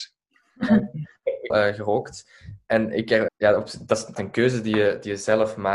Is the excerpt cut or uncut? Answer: cut